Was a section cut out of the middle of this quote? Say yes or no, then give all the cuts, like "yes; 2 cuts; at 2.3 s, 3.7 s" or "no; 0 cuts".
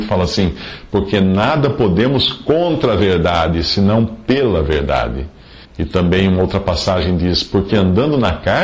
yes; 1 cut; at 5.6 s